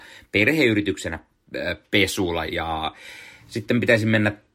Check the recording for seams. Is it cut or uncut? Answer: cut